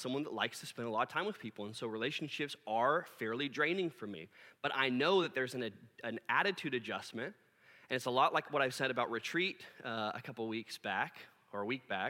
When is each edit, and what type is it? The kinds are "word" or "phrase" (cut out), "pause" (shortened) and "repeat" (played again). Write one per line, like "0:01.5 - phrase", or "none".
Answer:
none